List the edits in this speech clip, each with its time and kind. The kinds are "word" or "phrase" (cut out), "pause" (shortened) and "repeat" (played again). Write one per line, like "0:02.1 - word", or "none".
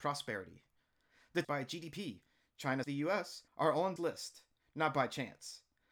0:01.4 - phrase
0:02.8 - word
0:03.5 - pause
0:04.0 - word